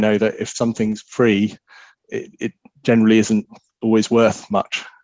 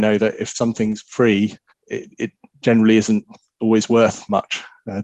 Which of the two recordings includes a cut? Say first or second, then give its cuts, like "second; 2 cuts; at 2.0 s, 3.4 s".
second; 1 cut; at 1.7 s